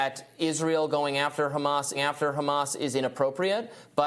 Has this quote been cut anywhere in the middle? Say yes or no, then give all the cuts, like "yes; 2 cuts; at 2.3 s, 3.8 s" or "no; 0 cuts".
yes; 1 cut; at 1.9 s